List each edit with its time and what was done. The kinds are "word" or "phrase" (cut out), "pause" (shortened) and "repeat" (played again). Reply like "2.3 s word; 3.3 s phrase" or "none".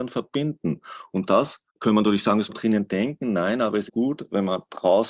1.7 s pause; 2.5 s word; 3.9 s phrase